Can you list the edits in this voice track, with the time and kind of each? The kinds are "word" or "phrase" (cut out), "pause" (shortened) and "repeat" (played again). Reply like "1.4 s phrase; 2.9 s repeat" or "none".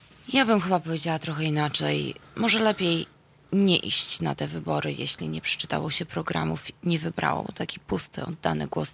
6.7 s word